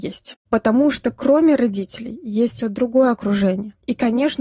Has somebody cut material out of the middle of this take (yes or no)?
yes